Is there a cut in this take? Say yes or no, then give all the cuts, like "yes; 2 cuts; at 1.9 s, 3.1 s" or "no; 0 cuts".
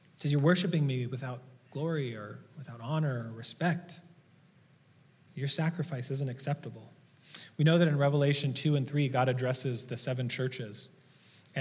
no; 0 cuts